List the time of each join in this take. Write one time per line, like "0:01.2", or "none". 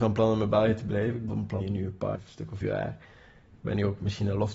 0:01.3
0:01.6
0:02.1
0:02.6

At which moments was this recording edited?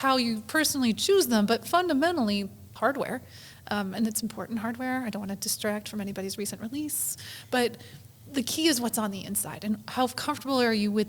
0:02.8

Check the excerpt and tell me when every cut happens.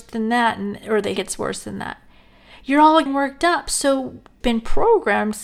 0:01.2
0:03.1
0:04.4

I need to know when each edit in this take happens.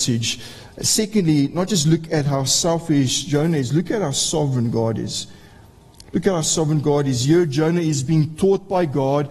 none

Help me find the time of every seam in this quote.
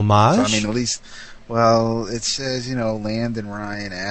none

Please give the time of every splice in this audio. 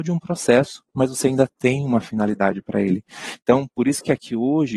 none

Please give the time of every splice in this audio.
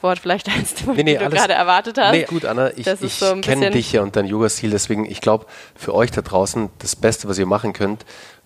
0:01.0
0:02.3

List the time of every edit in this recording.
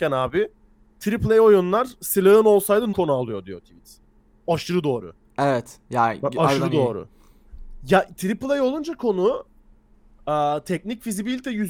0:02.9

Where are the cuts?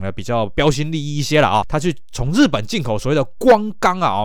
0:01.6

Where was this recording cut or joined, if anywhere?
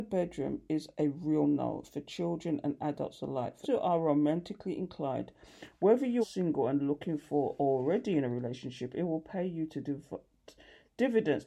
0:01.4
0:03.6
0:06.2

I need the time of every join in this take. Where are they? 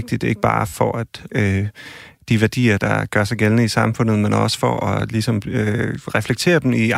0:01.3

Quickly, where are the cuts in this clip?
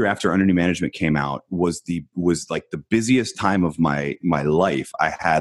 none

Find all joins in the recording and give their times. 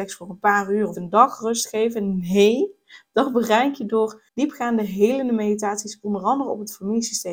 0:00.9
0:04.3

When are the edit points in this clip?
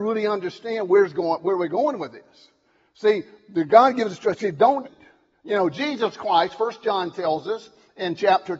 0:04.8

